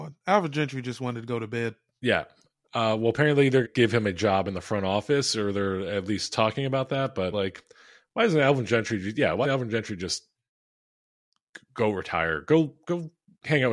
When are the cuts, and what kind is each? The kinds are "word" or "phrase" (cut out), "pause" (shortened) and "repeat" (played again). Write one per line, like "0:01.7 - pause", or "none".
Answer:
0:03.6 - word
0:07.3 - word
0:09.4 - word

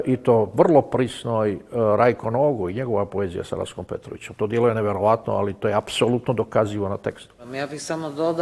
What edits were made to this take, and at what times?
none

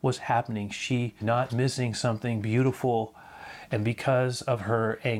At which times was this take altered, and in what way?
0:01.2 - word
0:01.5 - phrase

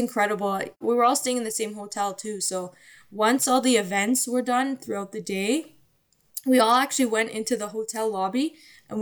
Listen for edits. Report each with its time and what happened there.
none

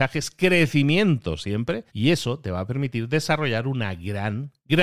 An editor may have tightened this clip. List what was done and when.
0:01.9 - pause

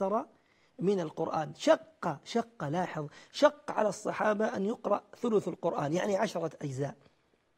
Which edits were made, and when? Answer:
none

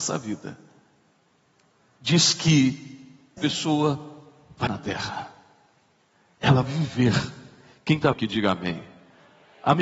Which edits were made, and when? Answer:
0:03.4 - word
0:04.7 - word
0:06.6 - word
0:08.1 - word

